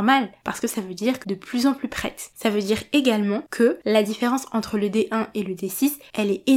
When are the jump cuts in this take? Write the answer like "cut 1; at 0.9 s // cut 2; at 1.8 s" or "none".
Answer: cut 1; at 1.2 s